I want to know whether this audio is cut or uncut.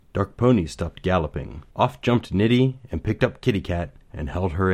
cut